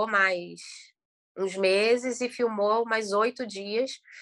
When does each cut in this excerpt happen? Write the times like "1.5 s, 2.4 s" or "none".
none